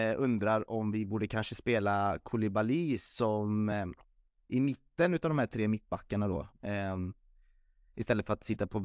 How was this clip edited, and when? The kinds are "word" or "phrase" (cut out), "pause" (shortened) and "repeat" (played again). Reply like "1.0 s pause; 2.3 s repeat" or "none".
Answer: none